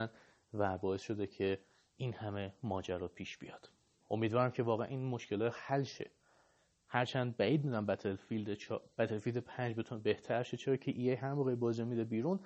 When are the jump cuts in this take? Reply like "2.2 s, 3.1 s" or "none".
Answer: none

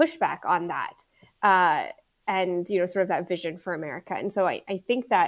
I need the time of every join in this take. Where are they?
none

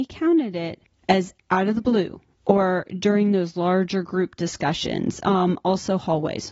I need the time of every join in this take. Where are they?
none

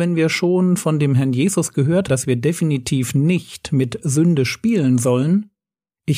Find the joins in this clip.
2.1 s

